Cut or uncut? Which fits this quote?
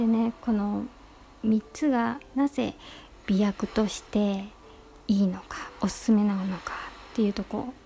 uncut